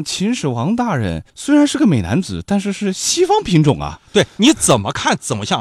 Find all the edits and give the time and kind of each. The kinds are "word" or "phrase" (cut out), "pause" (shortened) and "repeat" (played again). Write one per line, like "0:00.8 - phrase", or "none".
0:01.3 - pause